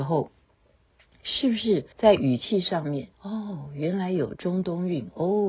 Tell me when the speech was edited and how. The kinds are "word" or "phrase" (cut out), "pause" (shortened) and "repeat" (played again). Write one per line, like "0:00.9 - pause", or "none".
0:01.9 - pause
0:03.1 - pause